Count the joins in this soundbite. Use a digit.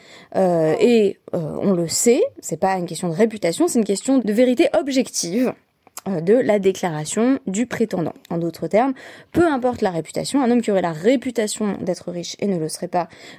2